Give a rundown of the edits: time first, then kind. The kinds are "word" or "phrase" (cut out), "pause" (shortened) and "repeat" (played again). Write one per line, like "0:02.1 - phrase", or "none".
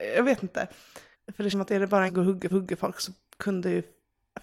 0:01.1 - pause
0:01.5 - word
0:02.1 - phrase
0:02.5 - repeat

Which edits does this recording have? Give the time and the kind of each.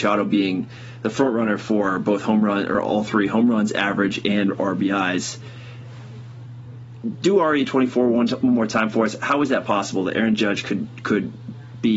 none

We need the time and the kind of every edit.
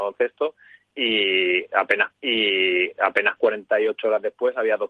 0:02.1 - repeat

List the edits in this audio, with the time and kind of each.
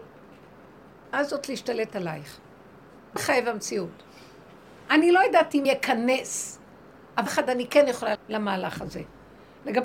0:01.1 - phrase
0:03.2 - word
0:05.6 - word
0:07.3 - phrase
0:08.1 - phrase

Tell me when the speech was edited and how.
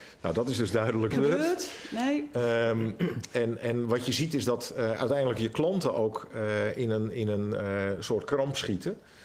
0:01.1 - phrase

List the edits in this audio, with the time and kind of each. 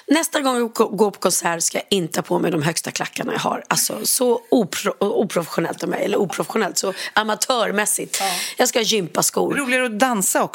none

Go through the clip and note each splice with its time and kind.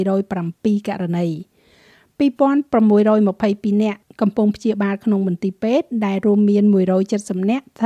none

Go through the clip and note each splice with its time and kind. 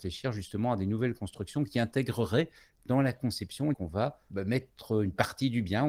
0:03.7 - word
0:04.3 - word

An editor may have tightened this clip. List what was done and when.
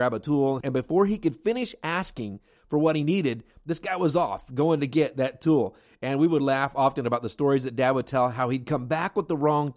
none

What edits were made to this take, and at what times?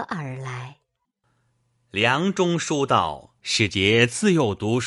0:03.4 - pause

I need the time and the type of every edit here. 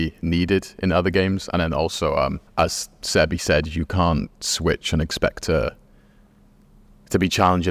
0:02.5 - pause

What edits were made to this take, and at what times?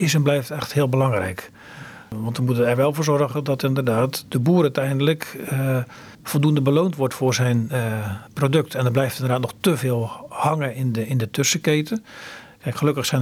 0:06.1 - pause

